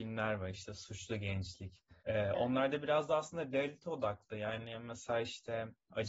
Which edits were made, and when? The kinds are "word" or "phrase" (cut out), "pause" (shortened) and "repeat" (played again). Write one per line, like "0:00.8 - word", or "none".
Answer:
0:02.0 - pause